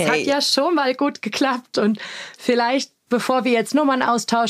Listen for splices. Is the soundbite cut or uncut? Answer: uncut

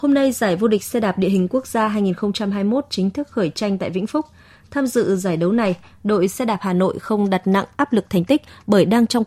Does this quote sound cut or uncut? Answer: uncut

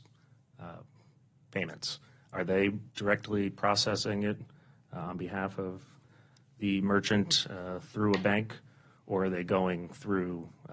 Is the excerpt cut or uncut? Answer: cut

